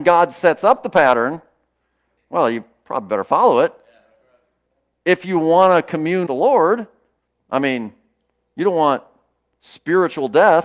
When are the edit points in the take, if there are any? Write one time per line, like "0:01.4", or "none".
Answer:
0:06.3
0:07.2

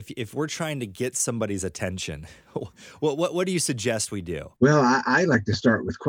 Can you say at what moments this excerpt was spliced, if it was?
0:04.6

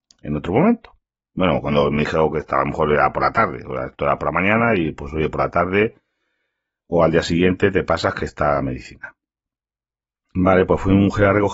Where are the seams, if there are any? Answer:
none

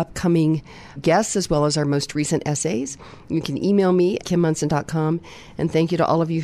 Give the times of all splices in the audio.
0:01.0
0:04.2

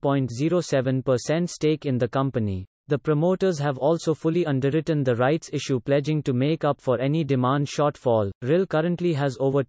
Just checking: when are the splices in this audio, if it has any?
0:02.8

